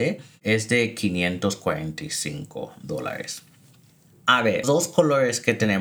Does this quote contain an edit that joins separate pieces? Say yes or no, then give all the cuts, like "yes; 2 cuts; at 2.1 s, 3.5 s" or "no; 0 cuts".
yes; 1 cut; at 4.6 s